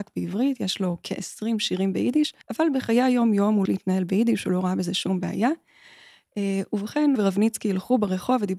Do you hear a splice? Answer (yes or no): yes